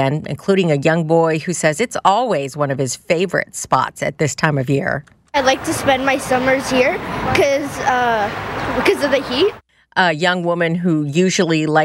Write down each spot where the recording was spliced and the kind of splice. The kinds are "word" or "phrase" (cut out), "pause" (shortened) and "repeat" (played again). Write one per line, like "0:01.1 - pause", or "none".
none